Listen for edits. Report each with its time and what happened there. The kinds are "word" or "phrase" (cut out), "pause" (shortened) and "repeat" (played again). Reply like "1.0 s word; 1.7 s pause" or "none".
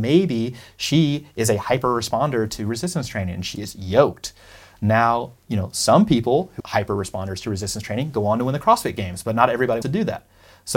3.5 s word; 6.6 s word; 9.8 s word